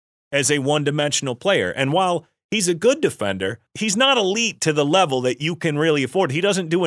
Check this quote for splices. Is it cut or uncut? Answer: uncut